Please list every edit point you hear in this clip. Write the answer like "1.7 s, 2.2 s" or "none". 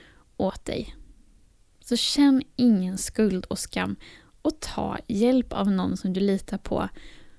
none